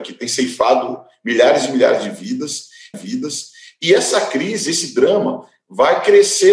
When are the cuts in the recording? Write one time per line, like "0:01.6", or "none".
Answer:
0:02.9